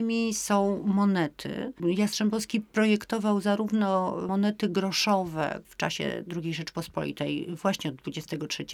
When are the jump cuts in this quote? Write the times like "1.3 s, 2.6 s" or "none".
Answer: 5.6 s